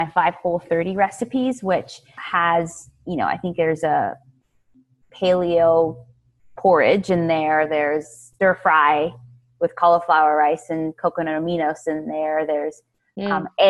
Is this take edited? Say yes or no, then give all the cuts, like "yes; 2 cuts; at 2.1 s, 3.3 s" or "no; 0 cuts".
yes; 2 cuts; at 2.2 s, 8.0 s